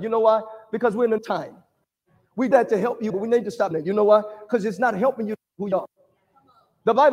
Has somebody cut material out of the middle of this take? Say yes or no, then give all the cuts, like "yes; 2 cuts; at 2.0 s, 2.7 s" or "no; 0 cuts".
yes; 5 cuts; at 1.2 s, 2.5 s, 3.1 s, 3.7 s, 5.7 s